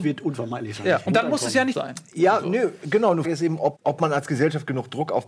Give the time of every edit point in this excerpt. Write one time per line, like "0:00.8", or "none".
0:01.1
0:01.7
0:03.2
0:03.8